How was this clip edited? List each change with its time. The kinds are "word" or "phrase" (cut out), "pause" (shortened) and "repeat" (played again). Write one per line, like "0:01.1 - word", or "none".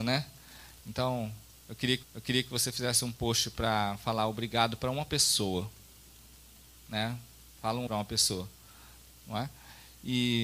0:02.0 - repeat
0:07.9 - phrase